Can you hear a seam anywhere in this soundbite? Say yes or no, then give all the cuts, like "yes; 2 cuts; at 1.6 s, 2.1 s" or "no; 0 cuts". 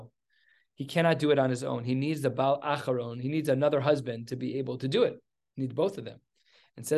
no; 0 cuts